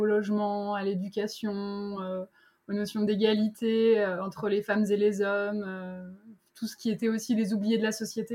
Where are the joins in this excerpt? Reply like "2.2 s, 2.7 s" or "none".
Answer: none